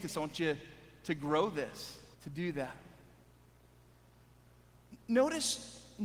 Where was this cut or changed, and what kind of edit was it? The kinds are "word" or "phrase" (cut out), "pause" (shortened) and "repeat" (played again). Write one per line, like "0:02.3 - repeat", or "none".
0:02.1 - pause